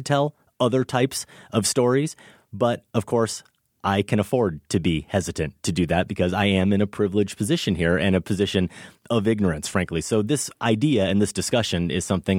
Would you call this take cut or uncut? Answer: uncut